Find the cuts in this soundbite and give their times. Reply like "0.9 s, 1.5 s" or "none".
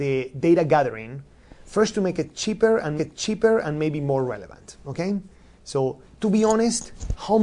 3.0 s, 6.1 s